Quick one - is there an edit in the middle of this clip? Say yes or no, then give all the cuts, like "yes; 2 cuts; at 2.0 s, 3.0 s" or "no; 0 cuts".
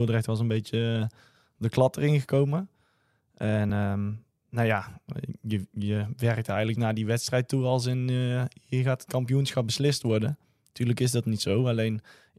no; 0 cuts